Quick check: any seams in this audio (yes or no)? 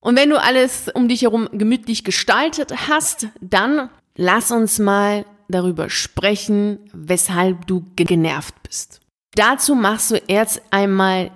yes